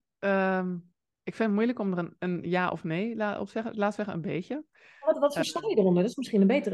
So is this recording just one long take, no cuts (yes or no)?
yes